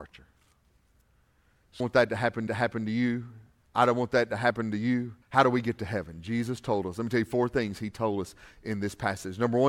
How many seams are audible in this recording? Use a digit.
3